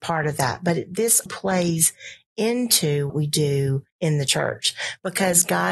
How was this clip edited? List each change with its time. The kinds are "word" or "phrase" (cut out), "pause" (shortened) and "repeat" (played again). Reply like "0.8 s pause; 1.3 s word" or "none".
1.3 s word; 3.1 s word; 3.9 s pause